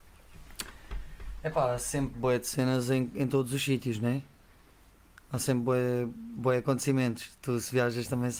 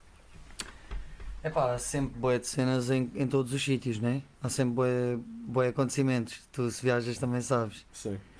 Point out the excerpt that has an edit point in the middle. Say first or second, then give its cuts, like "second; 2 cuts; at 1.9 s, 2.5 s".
second; 1 cut; at 4.3 s